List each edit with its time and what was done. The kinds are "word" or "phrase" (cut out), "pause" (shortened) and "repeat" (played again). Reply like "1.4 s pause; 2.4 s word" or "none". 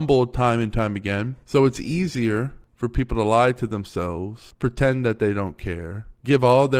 none